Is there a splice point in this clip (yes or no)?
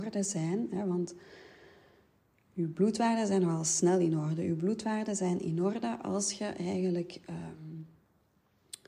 no